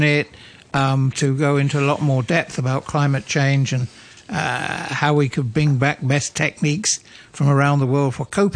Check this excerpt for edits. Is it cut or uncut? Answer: uncut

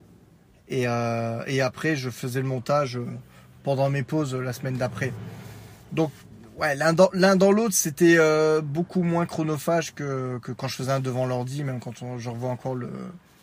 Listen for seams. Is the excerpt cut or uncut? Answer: uncut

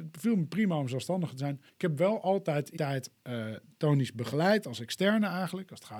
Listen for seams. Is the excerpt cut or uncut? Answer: cut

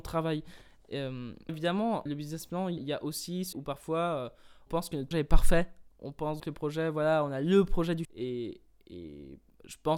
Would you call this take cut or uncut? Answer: cut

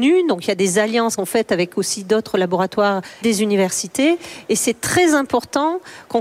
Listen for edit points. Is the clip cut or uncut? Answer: cut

